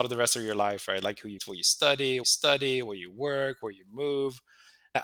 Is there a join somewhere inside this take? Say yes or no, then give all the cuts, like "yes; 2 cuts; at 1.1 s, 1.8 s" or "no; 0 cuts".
yes; 2 cuts; at 1.4 s, 2.2 s